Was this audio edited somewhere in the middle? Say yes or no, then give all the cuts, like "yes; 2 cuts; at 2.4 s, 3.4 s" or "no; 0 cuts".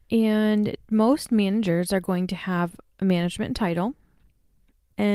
no; 0 cuts